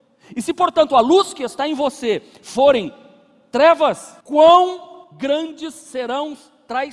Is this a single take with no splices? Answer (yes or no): no